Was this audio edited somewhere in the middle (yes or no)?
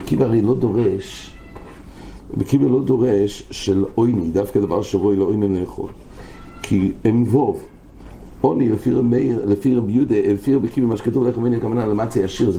no